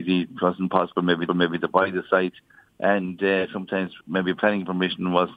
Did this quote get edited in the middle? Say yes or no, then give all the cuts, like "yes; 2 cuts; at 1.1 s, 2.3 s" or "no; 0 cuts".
yes; 2 cuts; at 1.3 s, 4.0 s